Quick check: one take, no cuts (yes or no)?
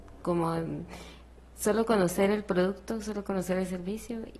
yes